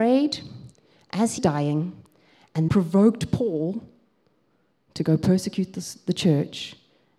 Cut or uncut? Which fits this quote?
cut